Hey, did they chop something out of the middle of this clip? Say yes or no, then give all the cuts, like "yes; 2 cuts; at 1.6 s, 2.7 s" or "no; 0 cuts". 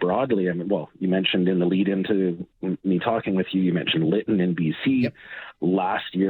no; 0 cuts